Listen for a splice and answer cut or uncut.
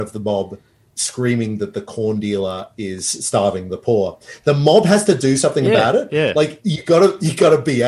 uncut